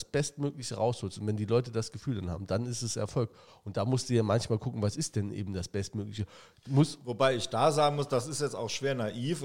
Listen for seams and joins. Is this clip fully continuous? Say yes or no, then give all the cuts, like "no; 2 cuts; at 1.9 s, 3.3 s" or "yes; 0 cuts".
yes; 0 cuts